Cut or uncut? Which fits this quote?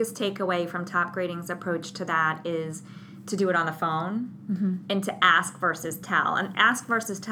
uncut